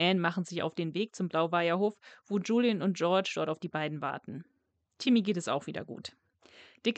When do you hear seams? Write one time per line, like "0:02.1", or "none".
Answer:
none